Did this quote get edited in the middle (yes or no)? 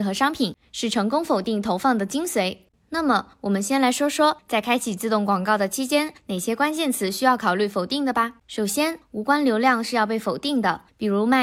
yes